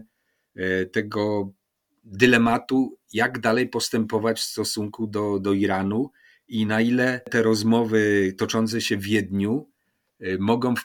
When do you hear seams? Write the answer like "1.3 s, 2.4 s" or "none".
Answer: none